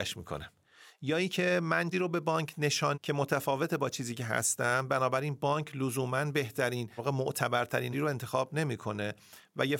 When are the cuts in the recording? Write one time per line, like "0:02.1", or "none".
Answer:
0:01.9
0:02.9
0:07.0
0:07.9